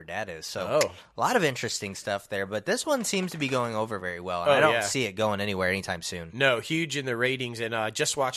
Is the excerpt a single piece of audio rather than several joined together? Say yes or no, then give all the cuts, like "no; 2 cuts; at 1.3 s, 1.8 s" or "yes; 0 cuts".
yes; 0 cuts